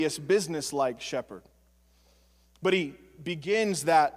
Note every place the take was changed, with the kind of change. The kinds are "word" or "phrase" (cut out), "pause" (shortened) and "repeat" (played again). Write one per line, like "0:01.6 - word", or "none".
none